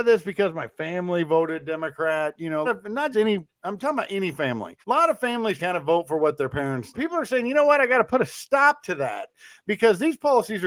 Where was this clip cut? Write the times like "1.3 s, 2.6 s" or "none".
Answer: 2.6 s, 3.1 s, 3.5 s, 4.8 s, 5.6 s, 6.9 s